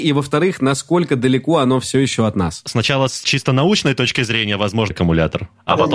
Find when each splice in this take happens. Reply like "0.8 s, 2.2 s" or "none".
4.9 s